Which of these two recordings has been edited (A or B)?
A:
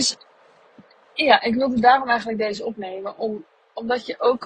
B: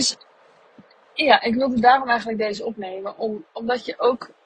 B